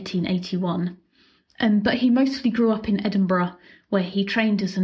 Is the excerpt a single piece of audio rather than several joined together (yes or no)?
yes